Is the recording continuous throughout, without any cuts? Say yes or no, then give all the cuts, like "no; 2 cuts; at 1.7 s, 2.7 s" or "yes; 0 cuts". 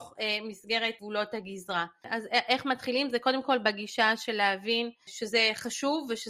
yes; 0 cuts